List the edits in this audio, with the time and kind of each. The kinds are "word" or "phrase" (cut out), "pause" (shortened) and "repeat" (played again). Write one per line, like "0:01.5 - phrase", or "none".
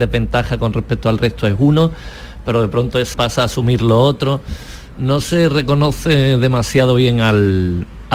0:03.1 - word